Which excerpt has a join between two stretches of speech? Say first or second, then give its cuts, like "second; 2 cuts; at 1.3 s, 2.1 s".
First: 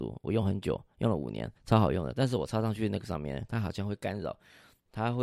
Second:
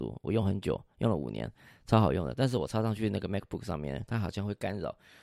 first; 2 cuts; at 1.6 s, 3.0 s